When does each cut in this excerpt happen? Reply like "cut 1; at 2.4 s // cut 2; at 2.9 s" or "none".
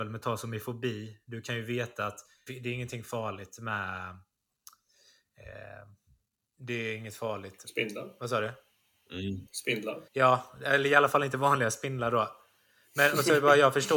cut 1; at 2.5 s // cut 2; at 10.1 s